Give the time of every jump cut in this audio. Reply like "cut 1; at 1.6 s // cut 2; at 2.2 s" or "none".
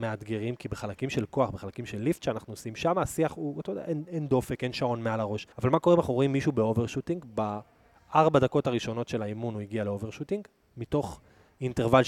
cut 1; at 5.5 s